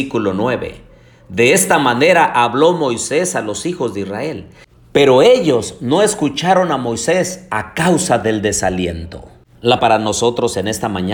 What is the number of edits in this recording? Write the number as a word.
one